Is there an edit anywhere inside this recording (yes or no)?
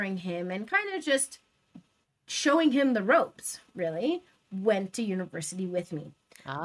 no